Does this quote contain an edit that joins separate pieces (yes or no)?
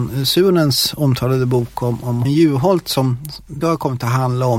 yes